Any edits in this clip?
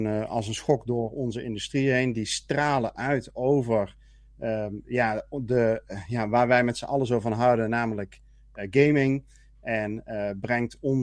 no; 0 cuts

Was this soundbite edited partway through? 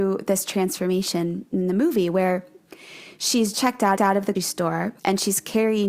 yes; 4 cuts; at 3.5 s, 4.0 s, 4.4 s, 5.0 s

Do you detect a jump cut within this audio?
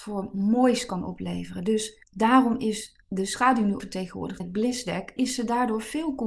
yes; 5 cuts; at 2.0 s, 3.0 s, 3.8 s, 4.4 s, 5.2 s

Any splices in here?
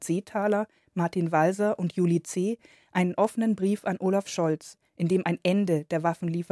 no; 0 cuts

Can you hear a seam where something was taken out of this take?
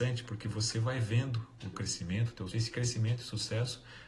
yes; 2 cuts; at 1.7 s, 2.5 s

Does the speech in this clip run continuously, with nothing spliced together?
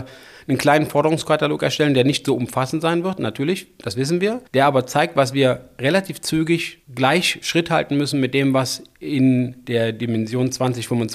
no; 2 cuts; at 4.5 s, 6.8 s

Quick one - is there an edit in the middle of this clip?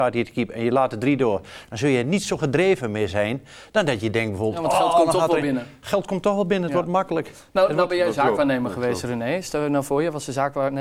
no; 0 cuts

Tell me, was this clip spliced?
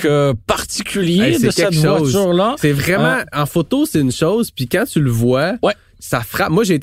no; 0 cuts

